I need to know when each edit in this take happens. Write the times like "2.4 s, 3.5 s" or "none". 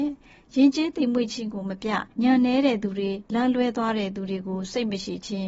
2.1 s, 3.3 s